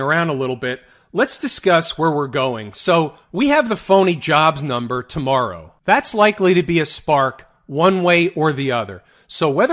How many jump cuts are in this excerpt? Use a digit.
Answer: 1